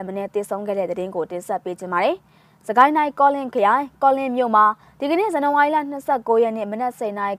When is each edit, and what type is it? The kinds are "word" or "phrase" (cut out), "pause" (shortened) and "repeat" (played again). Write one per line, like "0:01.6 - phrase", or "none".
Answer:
none